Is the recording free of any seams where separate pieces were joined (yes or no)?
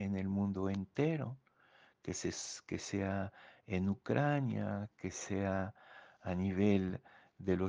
yes